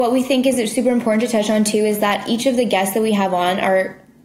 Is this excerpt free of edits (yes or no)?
yes